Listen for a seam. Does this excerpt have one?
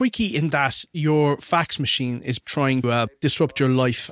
yes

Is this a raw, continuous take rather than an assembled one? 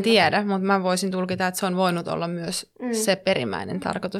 yes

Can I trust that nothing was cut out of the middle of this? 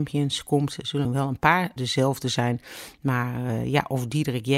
no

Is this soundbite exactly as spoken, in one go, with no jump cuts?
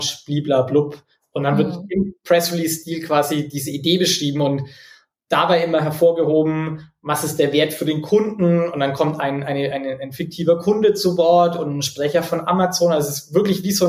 yes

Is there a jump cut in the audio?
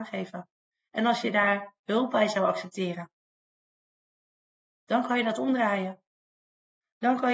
no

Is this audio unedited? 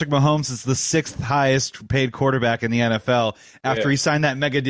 yes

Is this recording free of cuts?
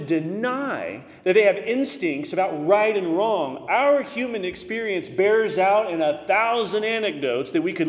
yes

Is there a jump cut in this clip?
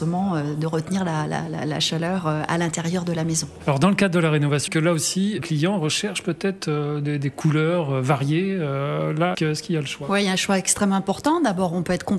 yes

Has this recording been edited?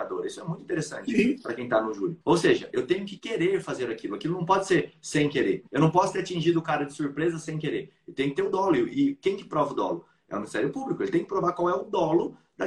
yes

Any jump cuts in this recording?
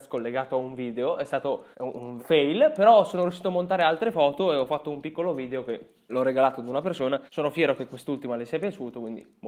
yes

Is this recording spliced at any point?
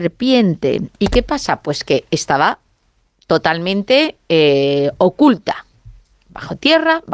no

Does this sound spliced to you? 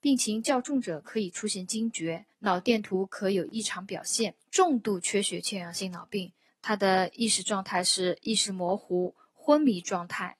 yes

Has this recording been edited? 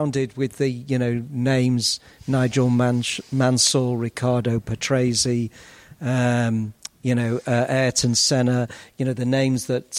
no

